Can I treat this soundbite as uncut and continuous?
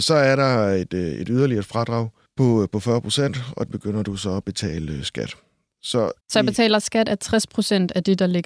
no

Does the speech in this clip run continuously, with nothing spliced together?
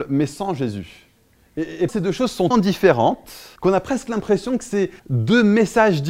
no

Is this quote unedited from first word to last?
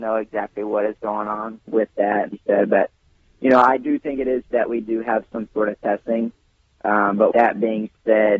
no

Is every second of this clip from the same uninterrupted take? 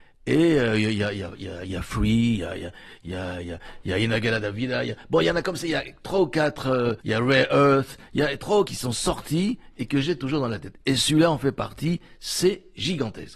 no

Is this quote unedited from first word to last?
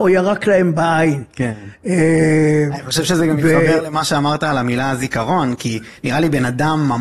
no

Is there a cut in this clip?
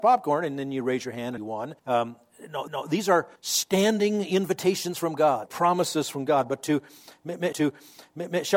yes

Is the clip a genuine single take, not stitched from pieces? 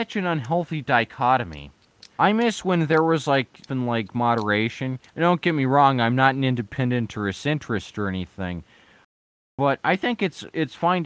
no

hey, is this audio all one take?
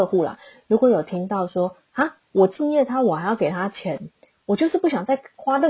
yes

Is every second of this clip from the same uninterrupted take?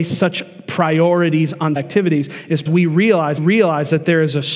no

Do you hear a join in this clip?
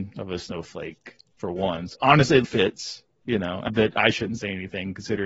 yes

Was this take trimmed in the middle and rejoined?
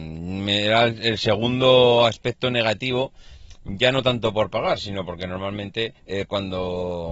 yes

